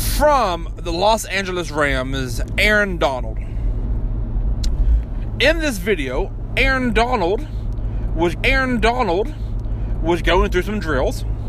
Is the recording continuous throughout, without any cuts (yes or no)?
no